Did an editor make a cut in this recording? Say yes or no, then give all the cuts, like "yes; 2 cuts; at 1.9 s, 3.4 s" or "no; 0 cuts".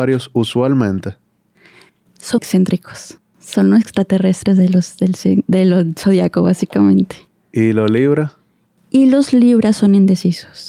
yes; 2 cuts; at 2.4 s, 7.3 s